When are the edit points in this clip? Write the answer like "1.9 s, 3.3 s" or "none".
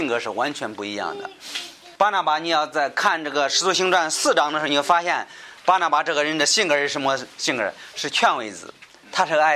2.0 s

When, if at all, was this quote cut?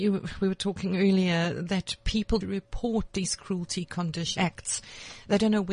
2.4 s, 4.4 s

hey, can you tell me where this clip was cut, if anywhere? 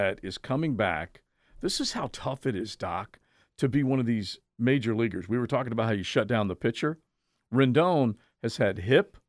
none

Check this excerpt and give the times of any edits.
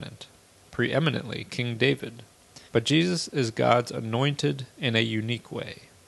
2.7 s

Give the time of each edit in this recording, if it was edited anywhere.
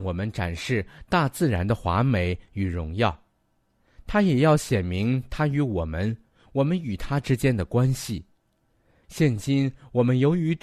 none

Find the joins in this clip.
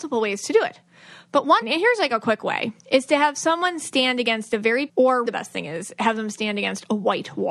1.6 s, 2.8 s, 4.9 s, 5.3 s

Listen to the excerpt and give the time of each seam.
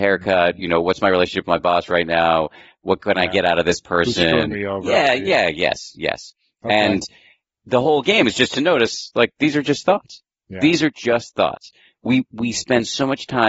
none

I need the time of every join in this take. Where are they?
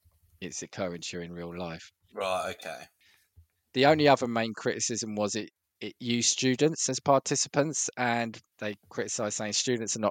none

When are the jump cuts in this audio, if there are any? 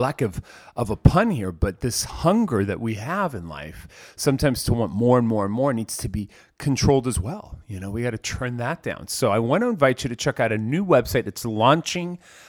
none

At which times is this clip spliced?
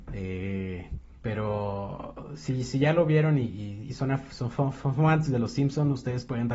1.2 s

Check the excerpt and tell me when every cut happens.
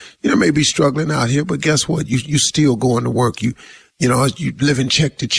none

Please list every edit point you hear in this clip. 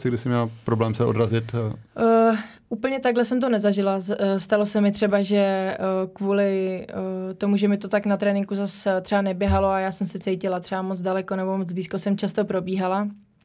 1.9 s

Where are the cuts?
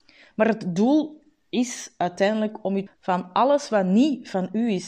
2.9 s

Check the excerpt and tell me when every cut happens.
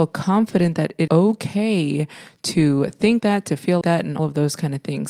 1.1 s, 3.2 s, 3.8 s, 4.2 s

